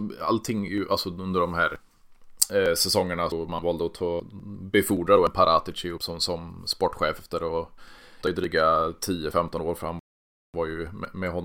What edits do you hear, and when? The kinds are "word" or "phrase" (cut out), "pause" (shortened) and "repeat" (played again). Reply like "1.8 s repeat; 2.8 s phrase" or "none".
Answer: 3.6 s word; 8.2 s phrase